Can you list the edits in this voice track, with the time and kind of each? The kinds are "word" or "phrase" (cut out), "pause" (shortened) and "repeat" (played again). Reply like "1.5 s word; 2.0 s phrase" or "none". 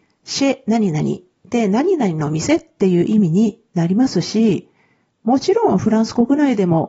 none